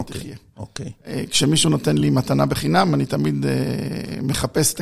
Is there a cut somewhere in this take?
no; 0 cuts

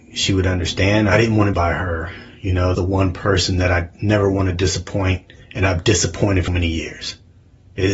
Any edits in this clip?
yes; 4 cuts; at 1.5 s, 2.7 s, 5.4 s, 6.5 s

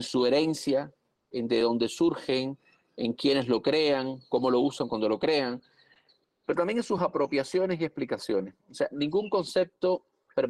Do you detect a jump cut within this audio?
no; 0 cuts

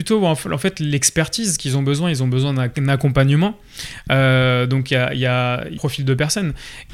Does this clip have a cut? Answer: yes; 1 cut; at 5.8 s

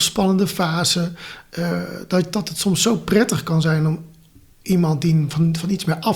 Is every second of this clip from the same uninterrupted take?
yes; 0 cuts

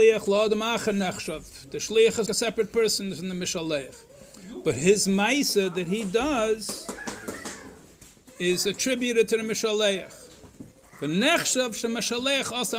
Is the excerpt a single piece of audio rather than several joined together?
no; 1 cut; at 2.3 s

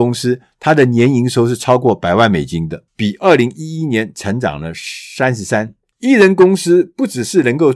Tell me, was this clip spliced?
yes; 1 cut; at 2.9 s

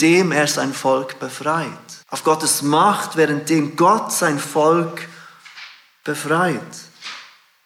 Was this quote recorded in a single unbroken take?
no; 1 cut; at 2.0 s

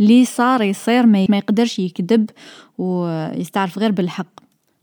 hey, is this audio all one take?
no; 1 cut; at 1.3 s

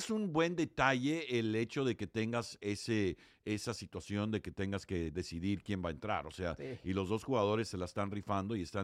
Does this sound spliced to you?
no; 0 cuts

